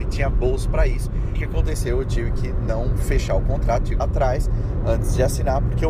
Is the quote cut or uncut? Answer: cut